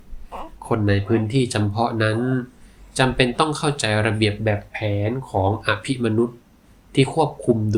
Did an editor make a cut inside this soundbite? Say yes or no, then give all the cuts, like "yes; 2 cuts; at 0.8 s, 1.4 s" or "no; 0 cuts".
no; 0 cuts